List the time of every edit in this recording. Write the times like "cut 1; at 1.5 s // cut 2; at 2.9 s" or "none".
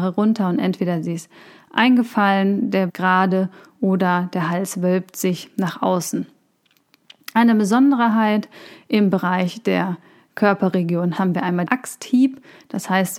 cut 1; at 2.9 s // cut 2; at 11.2 s // cut 3; at 11.7 s